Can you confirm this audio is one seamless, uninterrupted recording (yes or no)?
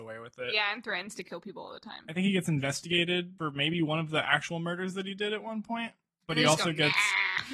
yes